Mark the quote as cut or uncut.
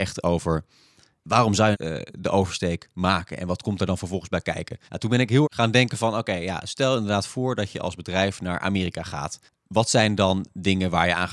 cut